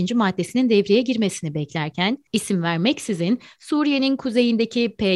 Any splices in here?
no; 0 cuts

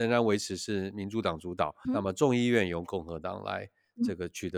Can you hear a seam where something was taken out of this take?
yes; 1 cut; at 1.8 s

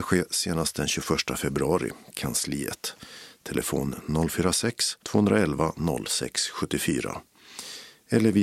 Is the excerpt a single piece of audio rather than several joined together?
no; 2 cuts; at 2.1 s, 5.0 s

